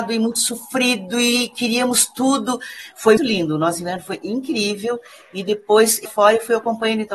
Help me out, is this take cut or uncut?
cut